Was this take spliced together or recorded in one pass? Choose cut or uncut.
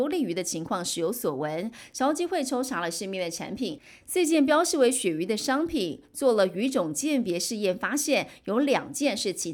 uncut